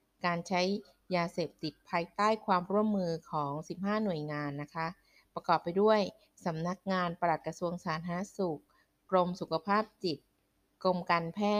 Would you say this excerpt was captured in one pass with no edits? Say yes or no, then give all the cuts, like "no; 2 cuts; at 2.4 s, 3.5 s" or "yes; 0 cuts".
yes; 0 cuts